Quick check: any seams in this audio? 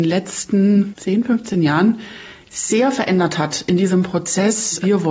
no; 0 cuts

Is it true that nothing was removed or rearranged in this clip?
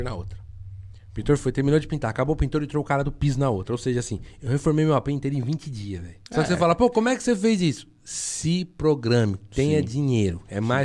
no; 1 cut; at 6.3 s

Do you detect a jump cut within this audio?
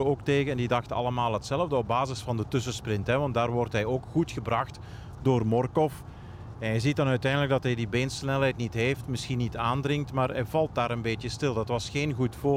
no; 0 cuts

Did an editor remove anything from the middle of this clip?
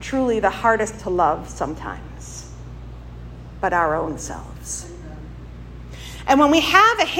yes; 1 cut; at 1.0 s

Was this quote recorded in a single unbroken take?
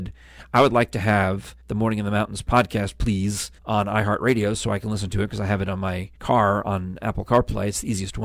no; 3 cuts; at 1.6 s, 3.6 s, 6.2 s

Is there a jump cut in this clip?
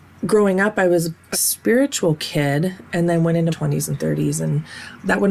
yes; 2 cuts; at 1.3 s, 3.5 s

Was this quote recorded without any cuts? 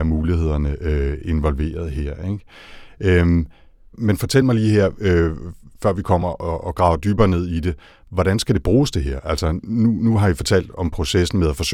yes; 0 cuts

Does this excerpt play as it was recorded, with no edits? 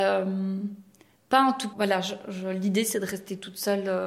no; 1 cut; at 1.7 s

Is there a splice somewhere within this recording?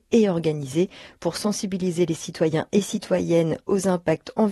no; 0 cuts

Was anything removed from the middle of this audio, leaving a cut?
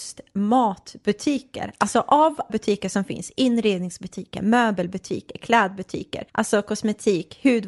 yes; 2 cuts; at 2.5 s, 6.3 s

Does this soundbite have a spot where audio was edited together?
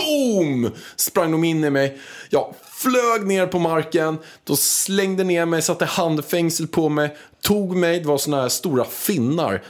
no; 0 cuts

